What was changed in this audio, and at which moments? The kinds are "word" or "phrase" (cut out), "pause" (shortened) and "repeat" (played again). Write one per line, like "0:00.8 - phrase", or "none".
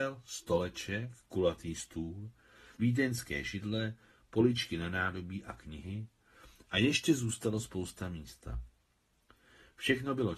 0:02.8 - word

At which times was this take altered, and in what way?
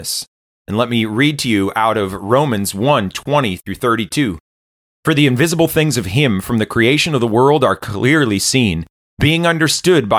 none

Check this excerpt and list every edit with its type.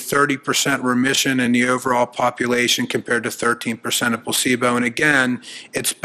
none

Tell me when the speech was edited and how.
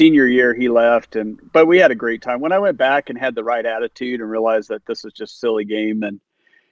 none

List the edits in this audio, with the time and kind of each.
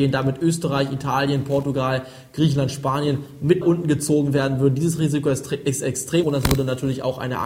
0:03.6 - word
0:06.2 - word

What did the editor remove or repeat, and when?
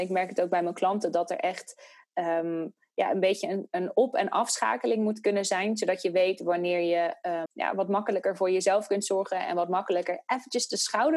0:07.5 - word

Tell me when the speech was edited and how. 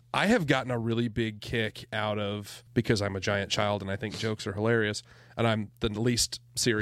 0:02.7 - pause

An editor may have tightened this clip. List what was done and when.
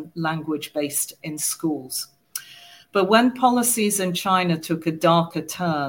0:01.2 - word

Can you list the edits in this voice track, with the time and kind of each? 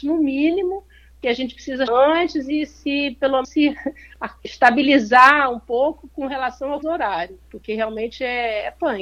0:01.2 - word
0:01.9 - word
0:03.4 - word
0:04.4 - word
0:06.8 - word

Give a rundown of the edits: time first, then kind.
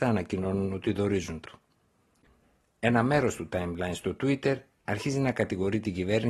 0:01.4 - word

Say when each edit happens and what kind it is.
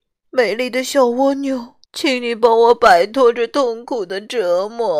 0:01.8 - pause

